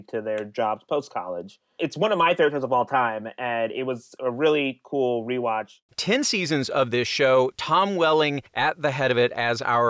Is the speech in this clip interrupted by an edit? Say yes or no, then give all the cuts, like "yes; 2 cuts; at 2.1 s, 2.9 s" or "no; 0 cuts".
yes; 1 cut; at 8.5 s